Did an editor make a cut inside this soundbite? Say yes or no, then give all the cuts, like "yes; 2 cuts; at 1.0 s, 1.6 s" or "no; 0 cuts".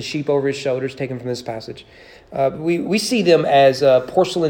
no; 0 cuts